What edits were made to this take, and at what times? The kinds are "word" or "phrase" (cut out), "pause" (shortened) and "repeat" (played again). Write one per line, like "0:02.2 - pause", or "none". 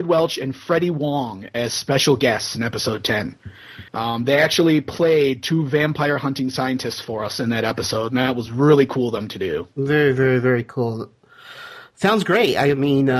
0:03.9 - pause